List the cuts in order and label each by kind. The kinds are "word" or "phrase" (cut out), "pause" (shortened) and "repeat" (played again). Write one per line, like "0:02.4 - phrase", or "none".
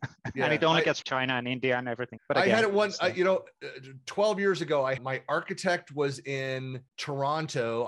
0:01.0 - phrase
0:02.2 - word
0:05.0 - phrase
0:06.9 - pause